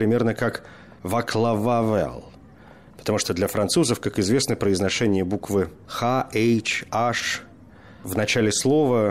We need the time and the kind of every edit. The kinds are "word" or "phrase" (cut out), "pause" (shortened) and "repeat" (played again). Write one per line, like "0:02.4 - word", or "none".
none